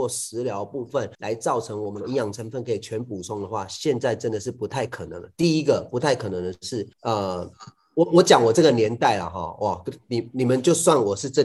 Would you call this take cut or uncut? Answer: cut